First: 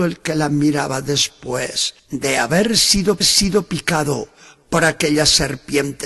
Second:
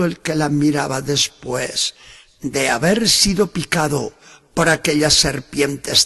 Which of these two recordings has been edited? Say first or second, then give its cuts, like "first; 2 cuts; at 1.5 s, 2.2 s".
first; 2 cuts; at 2.0 s, 3.2 s